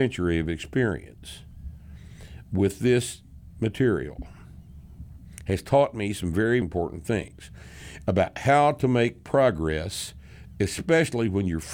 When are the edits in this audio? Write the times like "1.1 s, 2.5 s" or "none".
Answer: 6.6 s

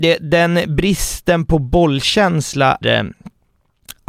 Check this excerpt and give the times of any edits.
2.8 s

